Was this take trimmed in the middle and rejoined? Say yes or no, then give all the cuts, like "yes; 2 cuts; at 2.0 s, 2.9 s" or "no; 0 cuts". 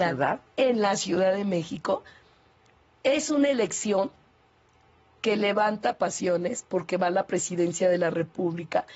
no; 0 cuts